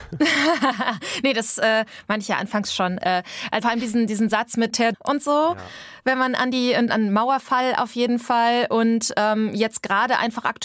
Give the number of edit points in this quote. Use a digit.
3